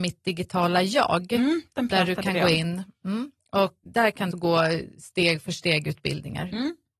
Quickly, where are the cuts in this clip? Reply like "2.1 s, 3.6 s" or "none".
3.9 s, 4.3 s